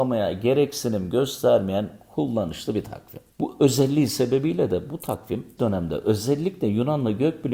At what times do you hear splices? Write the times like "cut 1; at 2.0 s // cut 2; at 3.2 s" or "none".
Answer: cut 1; at 3.3 s // cut 2; at 5.6 s